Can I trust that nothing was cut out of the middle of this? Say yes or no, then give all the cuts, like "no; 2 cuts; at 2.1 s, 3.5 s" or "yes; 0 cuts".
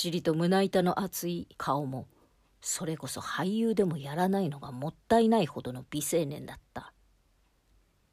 no; 1 cut; at 1.5 s